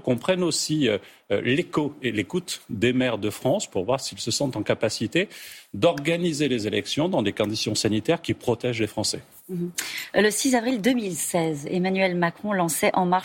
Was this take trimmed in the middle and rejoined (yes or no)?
no